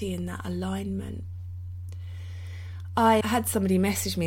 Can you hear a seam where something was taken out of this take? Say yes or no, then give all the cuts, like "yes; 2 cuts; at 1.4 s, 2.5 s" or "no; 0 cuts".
yes; 1 cut; at 3.2 s